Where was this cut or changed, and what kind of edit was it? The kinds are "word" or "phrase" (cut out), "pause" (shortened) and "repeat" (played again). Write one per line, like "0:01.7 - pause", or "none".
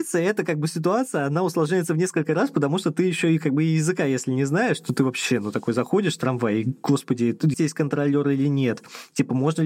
0:07.5 - word